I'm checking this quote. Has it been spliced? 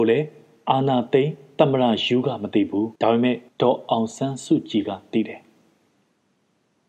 yes; 2 cuts; at 3.0 s, 3.5 s

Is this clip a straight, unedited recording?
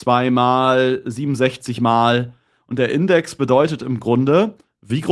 yes; 0 cuts

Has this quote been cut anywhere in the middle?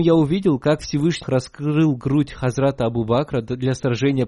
yes; 1 cut; at 1.2 s

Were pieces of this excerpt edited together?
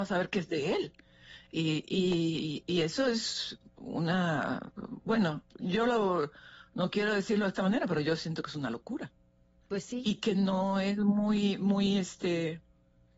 no; 0 cuts

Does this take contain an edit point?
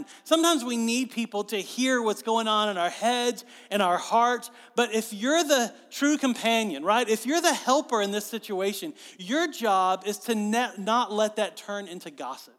no; 0 cuts

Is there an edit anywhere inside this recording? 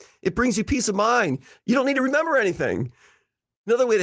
no; 0 cuts

